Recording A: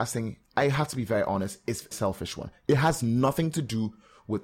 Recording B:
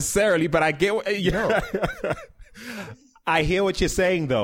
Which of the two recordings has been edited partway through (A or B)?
A